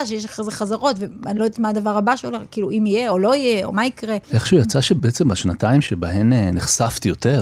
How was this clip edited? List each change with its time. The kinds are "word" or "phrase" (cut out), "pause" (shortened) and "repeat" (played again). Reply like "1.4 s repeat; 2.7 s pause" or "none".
4.2 s pause